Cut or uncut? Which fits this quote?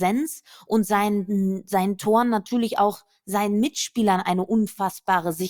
uncut